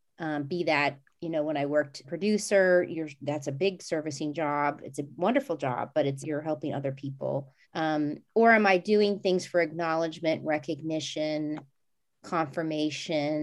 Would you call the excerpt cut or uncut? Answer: cut